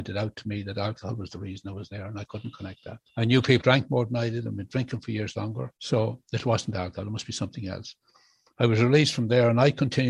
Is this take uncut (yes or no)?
no